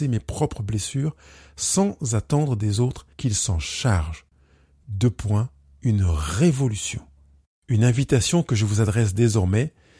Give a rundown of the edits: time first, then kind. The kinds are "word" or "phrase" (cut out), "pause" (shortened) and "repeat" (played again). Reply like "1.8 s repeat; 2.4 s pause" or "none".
3.1 s pause